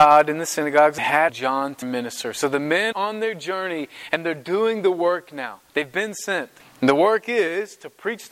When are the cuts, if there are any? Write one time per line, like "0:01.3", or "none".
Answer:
0:01.0
0:01.3
0:01.8
0:02.9
0:05.7
0:06.6